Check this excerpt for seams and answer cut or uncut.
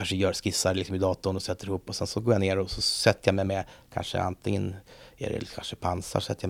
uncut